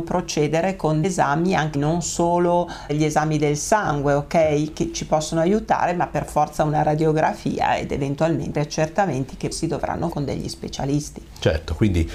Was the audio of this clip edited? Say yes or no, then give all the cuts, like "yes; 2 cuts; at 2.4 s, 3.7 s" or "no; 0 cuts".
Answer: yes; 6 cuts; at 1.0 s, 1.7 s, 2.9 s, 8.5 s, 9.5 s, 10.1 s